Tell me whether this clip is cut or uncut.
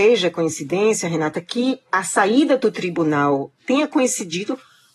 uncut